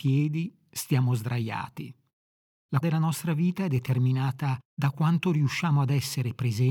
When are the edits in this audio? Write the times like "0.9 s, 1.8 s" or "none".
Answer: 2.8 s, 4.6 s